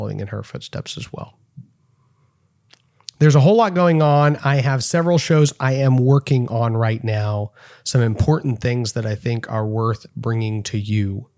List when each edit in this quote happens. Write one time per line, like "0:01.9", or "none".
none